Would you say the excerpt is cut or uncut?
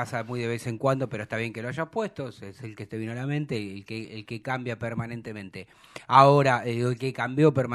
uncut